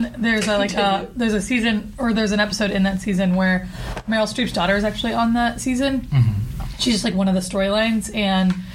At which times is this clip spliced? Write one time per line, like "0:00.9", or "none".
none